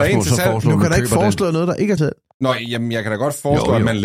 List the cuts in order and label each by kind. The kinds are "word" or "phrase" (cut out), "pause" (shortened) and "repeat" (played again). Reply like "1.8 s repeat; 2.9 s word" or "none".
2.0 s word